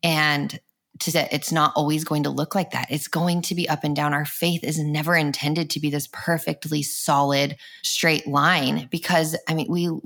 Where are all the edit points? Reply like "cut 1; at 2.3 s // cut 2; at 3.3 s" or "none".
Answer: cut 1; at 1.1 s // cut 2; at 7.8 s